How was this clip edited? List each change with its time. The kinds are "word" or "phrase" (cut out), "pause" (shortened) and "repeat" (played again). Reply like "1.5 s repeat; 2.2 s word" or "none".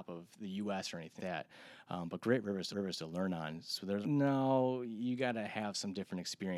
1.2 s word; 2.7 s repeat; 4.0 s word